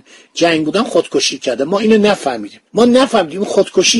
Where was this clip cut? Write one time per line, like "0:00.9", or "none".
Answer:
0:02.7